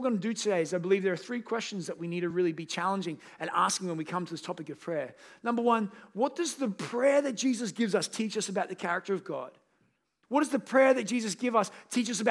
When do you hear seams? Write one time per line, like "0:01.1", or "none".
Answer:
none